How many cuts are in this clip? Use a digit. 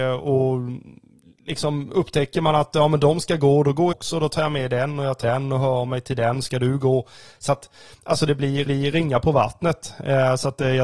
3